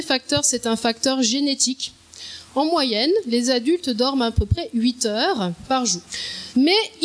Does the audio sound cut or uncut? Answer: uncut